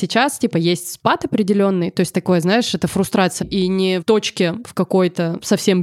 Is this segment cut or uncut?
cut